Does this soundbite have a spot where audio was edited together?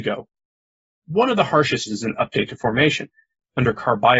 yes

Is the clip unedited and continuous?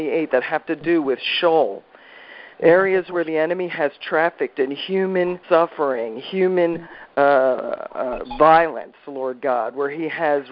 no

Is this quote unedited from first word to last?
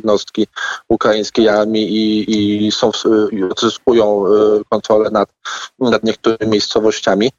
yes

